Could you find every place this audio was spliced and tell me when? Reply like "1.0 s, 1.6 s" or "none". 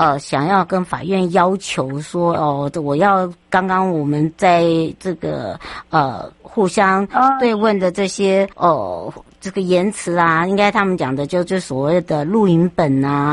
3.4 s, 8.5 s